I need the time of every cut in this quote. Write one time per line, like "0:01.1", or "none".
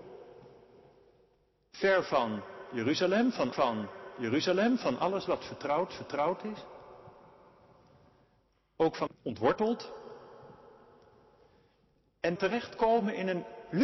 0:03.5
0:05.9
0:09.1
0:12.4